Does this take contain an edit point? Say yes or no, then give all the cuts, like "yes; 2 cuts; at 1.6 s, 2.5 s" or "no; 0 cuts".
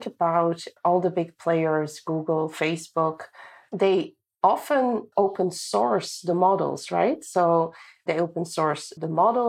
no; 0 cuts